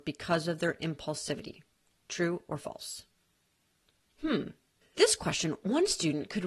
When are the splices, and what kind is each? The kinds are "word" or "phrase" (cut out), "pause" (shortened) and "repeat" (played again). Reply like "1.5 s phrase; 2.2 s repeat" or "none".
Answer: 5.0 s word